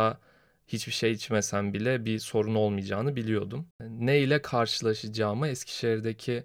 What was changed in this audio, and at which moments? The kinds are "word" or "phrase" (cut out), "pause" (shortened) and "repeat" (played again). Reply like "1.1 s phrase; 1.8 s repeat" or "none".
3.7 s pause